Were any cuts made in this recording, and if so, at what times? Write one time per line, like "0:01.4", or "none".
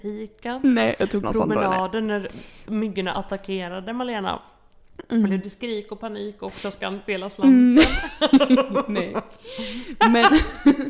0:01.2

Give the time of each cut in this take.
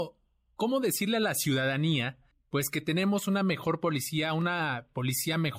0:02.3

